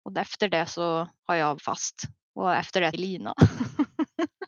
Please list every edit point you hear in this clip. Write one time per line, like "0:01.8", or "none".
0:01.2
0:01.6
0:02.2
0:02.9